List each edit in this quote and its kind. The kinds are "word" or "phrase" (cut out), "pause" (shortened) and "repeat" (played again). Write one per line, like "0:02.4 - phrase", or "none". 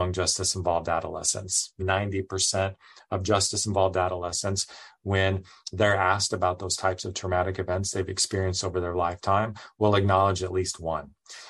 0:01.8 - phrase